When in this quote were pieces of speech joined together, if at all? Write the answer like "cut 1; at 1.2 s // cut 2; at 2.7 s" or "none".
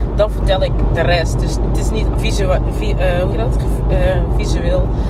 cut 1; at 2.1 s // cut 2; at 3.3 s